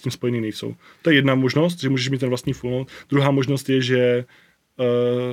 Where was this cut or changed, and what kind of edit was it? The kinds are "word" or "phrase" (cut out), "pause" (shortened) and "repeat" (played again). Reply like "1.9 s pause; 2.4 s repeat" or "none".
none

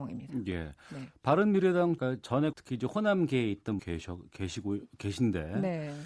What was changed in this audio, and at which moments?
2.0 s word; 2.5 s word; 3.8 s word

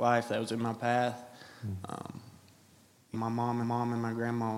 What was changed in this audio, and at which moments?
3.1 s word; 3.6 s repeat

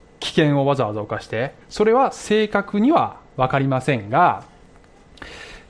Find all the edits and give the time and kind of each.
1.6 s pause

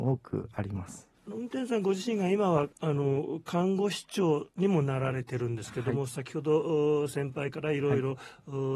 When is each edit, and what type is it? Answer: 1.2 s pause; 2.7 s pause; 4.5 s pause

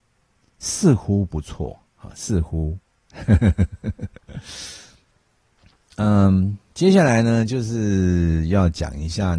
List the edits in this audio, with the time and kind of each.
4.2 s pause

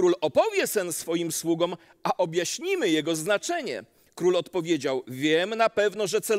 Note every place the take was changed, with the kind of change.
none

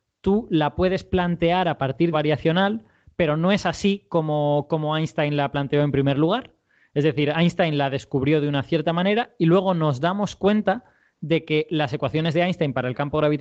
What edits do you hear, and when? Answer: 2.1 s phrase

